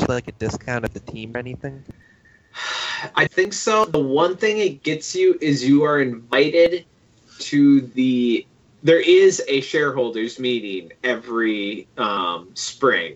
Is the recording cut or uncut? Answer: cut